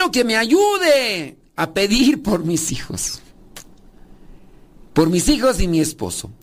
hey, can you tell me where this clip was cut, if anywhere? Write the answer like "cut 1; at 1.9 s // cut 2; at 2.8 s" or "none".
none